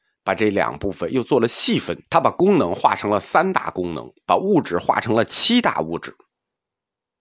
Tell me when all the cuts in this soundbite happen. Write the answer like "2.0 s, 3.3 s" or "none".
2.0 s